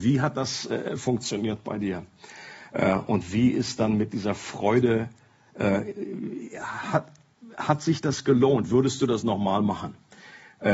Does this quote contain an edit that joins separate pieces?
no; 0 cuts

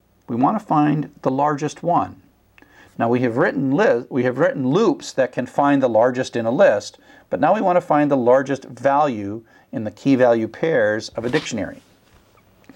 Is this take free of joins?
yes; 0 cuts

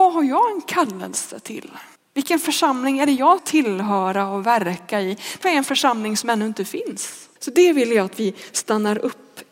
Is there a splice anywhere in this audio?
yes; 4 cuts; at 2.0 s, 3.4 s, 5.4 s, 7.4 s

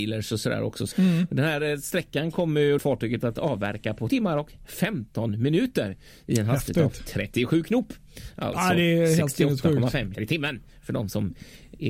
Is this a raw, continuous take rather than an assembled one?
no; 4 cuts; at 0.9 s, 2.8 s, 4.1 s, 10.1 s

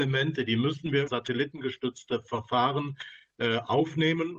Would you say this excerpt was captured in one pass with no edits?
no; 1 cut; at 1.1 s

